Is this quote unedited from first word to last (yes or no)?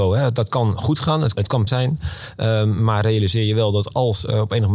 no